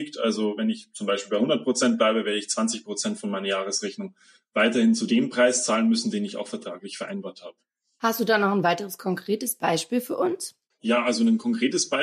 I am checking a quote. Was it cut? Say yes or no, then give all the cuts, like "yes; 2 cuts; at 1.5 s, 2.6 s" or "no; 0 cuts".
no; 0 cuts